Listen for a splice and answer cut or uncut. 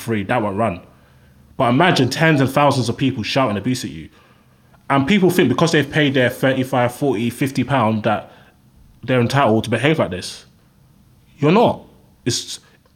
uncut